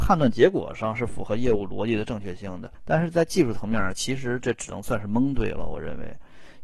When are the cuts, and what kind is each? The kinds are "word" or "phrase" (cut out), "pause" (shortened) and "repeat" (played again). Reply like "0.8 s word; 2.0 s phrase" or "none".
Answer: 2.7 s pause